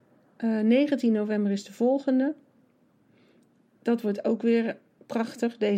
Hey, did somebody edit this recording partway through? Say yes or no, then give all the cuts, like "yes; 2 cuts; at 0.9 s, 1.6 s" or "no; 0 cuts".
no; 0 cuts